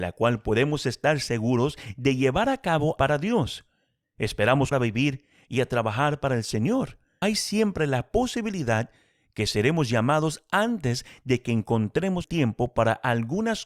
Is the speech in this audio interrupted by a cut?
yes; 4 cuts; at 3.0 s, 4.7 s, 7.2 s, 12.2 s

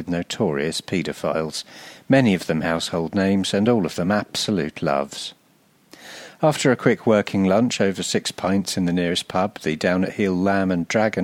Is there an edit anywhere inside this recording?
no; 0 cuts

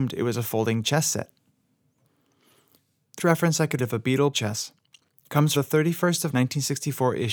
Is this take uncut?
no; 5 cuts; at 3.2 s, 3.8 s, 4.3 s, 5.6 s, 6.3 s

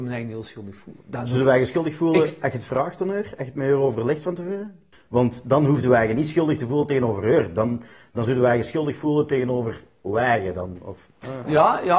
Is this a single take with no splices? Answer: yes; 0 cuts

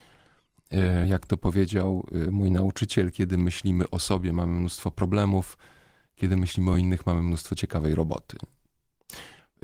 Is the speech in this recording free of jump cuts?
yes; 0 cuts

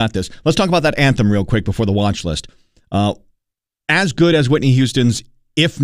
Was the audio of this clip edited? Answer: no; 0 cuts

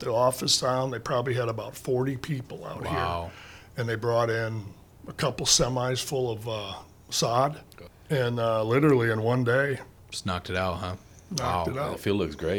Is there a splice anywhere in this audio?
no; 0 cuts

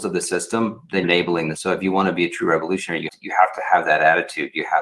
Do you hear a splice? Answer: yes; 3 cuts; at 1.0 s, 1.5 s, 3.1 s

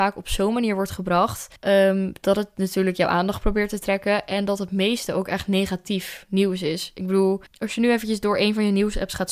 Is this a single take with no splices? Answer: no; 2 cuts; at 1.6 s, 7.5 s

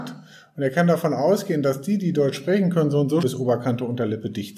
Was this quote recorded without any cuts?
no; 1 cut; at 3.2 s

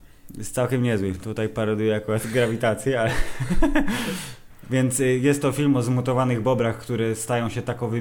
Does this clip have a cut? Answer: no; 0 cuts

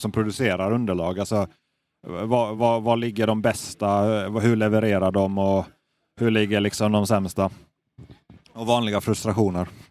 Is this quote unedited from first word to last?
yes; 0 cuts

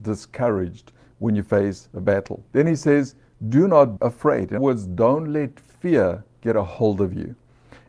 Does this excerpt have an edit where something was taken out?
yes; 3 cuts; at 2.5 s, 4.0 s, 4.6 s

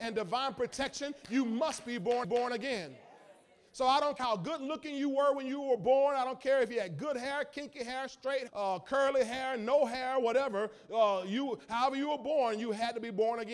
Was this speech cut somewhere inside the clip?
yes; 3 cuts; at 2.2 s, 4.2 s, 8.5 s

